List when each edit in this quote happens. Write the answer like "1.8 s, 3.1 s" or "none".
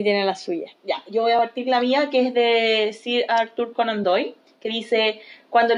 none